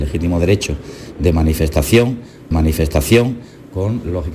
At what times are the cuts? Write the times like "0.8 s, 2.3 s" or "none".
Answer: 2.5 s